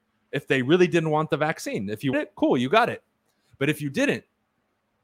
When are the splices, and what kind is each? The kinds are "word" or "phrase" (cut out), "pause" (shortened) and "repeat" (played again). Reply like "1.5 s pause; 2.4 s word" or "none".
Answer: 2.1 s word